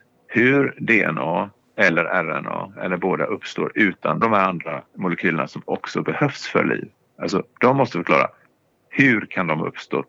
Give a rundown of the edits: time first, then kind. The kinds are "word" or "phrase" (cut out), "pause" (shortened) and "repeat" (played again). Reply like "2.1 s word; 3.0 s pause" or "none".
4.2 s phrase; 4.9 s pause